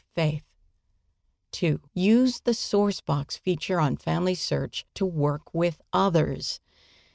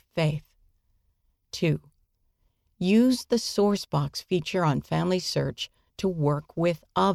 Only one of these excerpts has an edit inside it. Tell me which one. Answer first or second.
first